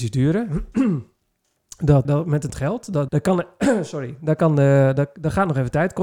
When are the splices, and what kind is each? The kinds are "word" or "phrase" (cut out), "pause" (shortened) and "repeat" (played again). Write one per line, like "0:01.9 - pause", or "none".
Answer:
0:02.0 - word
0:02.5 - phrase
0:03.1 - word